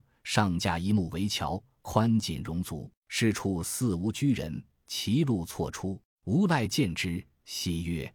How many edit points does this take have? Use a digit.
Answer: 2